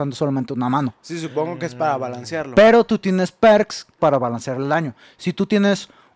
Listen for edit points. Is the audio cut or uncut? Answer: cut